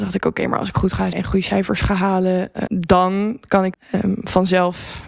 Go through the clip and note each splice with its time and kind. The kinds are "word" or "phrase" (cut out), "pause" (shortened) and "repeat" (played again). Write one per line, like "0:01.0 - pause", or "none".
0:01.1 - word
0:02.7 - word
0:03.7 - word

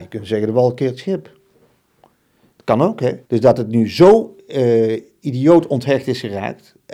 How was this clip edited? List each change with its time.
0:03.3 - pause

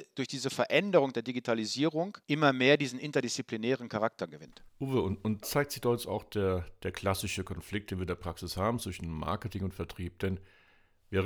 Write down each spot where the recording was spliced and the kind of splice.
0:02.2 - pause
0:04.7 - pause
0:05.4 - word

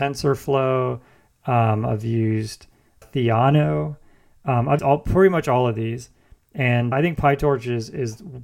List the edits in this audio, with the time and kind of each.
0:03.0 - word
0:04.8 - word
0:06.9 - word

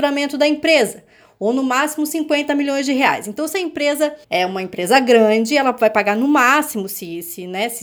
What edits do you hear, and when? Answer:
0:04.2 - pause

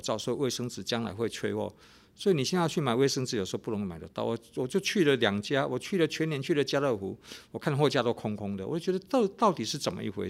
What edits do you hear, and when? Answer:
none

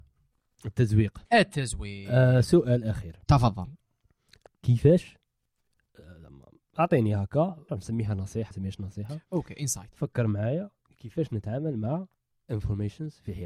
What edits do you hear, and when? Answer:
0:01.3 - pause
0:03.2 - pause
0:04.5 - phrase
0:07.7 - phrase
0:08.5 - word

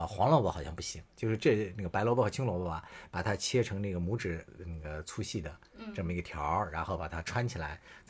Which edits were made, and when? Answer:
0:04.5 - pause

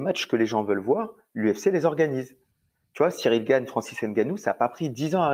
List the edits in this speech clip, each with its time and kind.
none

